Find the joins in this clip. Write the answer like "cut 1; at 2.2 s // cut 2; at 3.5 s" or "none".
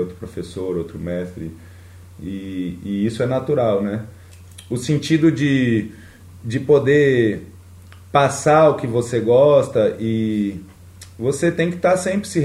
none

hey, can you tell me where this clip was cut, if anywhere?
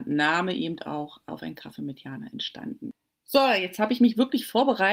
none

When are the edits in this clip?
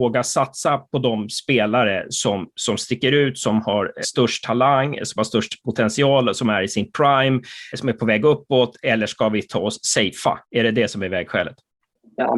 cut 1; at 4.0 s // cut 2; at 7.7 s // cut 3; at 10.4 s

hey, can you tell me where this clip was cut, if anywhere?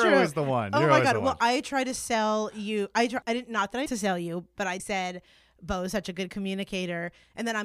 cut 1; at 3.2 s // cut 2; at 3.9 s // cut 3; at 4.8 s

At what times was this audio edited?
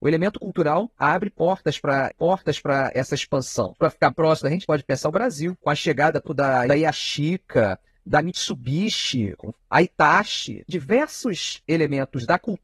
cut 1; at 0.9 s // cut 2; at 2.1 s // cut 3; at 4.1 s // cut 4; at 4.6 s // cut 5; at 6.3 s // cut 6; at 6.7 s

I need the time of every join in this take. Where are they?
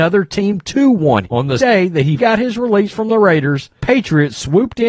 cut 1; at 1.2 s // cut 2; at 1.6 s // cut 3; at 2.2 s // cut 4; at 3.8 s

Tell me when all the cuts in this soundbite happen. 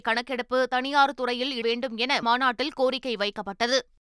cut 1; at 1.6 s // cut 2; at 2.2 s

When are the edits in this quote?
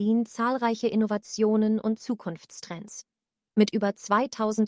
none

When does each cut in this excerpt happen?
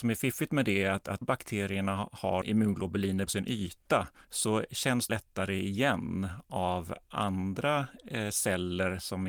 cut 1; at 1.2 s // cut 2; at 3.3 s // cut 3; at 4.2 s // cut 4; at 5.1 s

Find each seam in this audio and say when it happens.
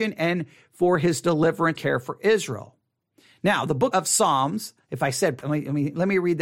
cut 1; at 1.8 s // cut 2; at 3.9 s // cut 3; at 5.4 s

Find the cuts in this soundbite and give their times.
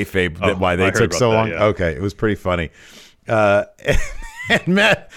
none

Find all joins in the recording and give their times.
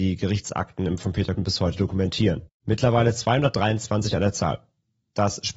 cut 1; at 1.0 s // cut 2; at 1.4 s // cut 3; at 2.5 s

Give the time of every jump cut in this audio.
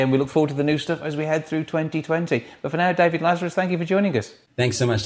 none

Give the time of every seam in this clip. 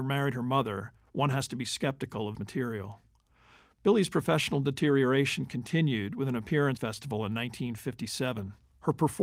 cut 1; at 2.3 s // cut 2; at 6.8 s

